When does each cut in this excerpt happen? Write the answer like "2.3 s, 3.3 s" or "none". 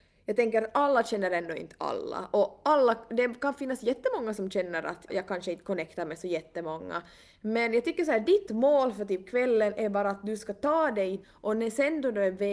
5.1 s, 11.2 s